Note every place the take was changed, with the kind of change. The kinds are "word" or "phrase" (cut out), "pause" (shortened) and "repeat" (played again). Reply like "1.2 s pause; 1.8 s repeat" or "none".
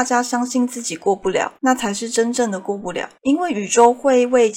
1.6 s pause; 3.2 s pause